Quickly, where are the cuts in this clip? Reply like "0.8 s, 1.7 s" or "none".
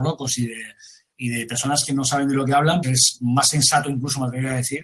2.8 s